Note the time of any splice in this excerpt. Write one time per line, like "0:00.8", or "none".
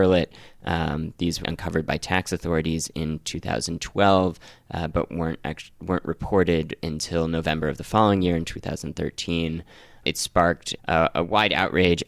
0:01.4
0:10.8